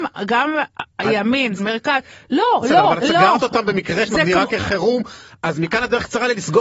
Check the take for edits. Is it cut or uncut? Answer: cut